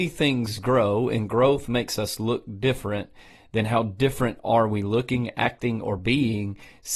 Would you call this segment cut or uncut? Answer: uncut